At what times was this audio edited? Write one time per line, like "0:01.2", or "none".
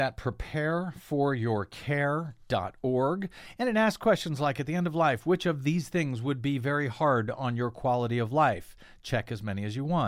none